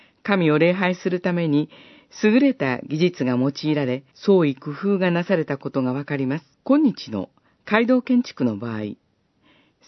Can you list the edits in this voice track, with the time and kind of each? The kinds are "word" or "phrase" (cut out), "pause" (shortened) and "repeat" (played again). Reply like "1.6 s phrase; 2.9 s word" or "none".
4.1 s pause; 6.5 s pause